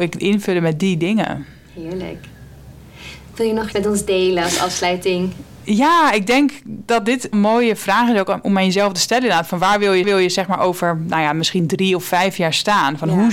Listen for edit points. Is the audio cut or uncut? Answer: cut